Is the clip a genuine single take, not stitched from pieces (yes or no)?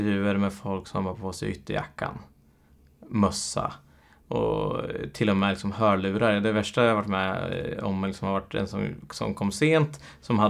yes